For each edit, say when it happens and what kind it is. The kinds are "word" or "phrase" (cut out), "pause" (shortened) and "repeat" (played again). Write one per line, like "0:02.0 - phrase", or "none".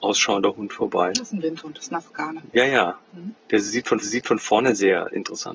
0:04.0 - repeat